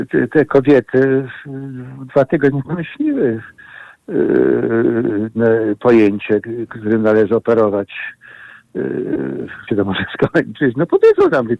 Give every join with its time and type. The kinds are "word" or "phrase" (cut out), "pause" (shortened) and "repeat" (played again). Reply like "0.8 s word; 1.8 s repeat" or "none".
2.6 s word; 9.7 s word